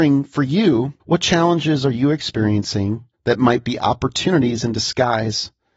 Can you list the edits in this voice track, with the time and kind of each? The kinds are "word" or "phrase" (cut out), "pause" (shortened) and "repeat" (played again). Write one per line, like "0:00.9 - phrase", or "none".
0:01.0 - pause
0:03.1 - pause